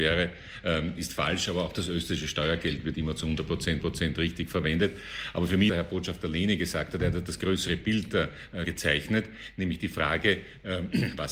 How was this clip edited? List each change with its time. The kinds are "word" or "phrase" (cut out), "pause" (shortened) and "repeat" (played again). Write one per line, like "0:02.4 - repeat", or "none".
0:02.9 - word
0:03.8 - repeat
0:05.7 - phrase
0:08.6 - word